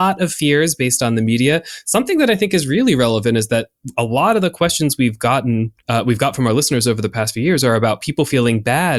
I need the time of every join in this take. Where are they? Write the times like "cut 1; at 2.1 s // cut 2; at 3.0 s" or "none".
cut 1; at 5.8 s